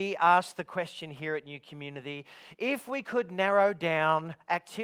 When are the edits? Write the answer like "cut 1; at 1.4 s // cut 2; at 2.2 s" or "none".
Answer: none